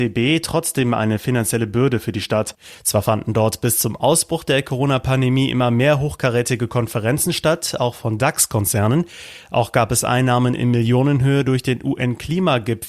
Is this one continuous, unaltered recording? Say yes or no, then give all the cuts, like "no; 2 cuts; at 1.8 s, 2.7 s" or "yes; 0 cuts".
yes; 0 cuts